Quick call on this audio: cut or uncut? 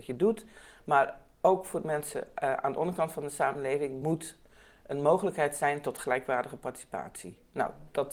uncut